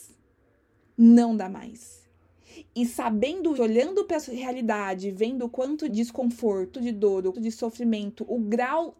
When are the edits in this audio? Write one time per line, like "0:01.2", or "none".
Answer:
0:03.6
0:04.2
0:05.9
0:06.7
0:07.3